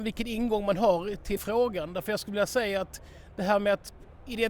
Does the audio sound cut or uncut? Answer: cut